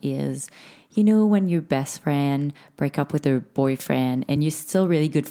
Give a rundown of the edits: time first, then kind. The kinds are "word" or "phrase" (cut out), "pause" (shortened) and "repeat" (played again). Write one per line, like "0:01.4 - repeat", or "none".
none